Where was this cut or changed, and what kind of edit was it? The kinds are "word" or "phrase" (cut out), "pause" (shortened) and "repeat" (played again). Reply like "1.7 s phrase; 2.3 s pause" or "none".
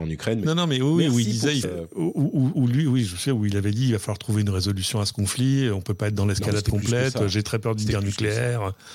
1.6 s word